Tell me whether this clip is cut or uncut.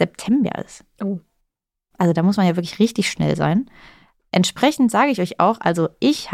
uncut